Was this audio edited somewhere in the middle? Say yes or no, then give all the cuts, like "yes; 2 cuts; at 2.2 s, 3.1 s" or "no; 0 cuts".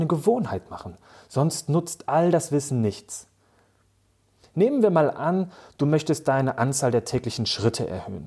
no; 0 cuts